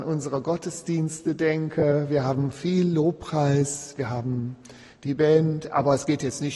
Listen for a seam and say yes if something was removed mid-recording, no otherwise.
no